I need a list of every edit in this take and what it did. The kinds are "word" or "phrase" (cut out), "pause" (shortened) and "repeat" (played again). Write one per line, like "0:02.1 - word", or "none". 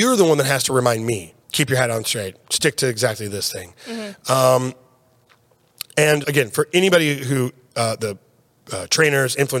0:01.4 - pause
0:06.2 - phrase